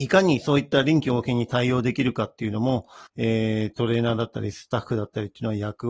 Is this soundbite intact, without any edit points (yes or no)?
no